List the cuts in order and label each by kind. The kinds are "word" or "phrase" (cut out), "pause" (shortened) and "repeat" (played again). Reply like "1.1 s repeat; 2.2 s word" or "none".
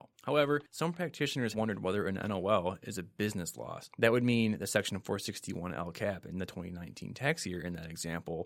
1.5 s word